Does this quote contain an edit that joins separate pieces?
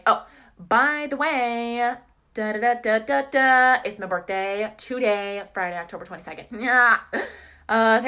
no; 0 cuts

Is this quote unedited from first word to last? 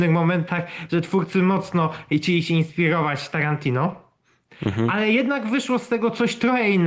yes; 0 cuts

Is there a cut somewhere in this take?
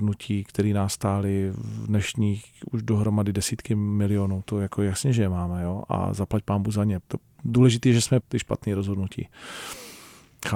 yes; 2 cuts; at 7.0 s, 8.2 s

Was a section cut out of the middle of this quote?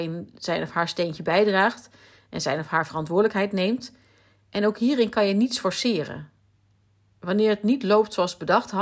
no; 0 cuts

